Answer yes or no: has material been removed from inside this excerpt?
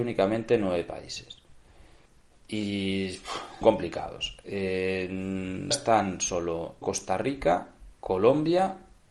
yes